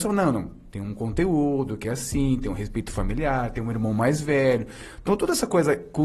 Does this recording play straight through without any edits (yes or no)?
yes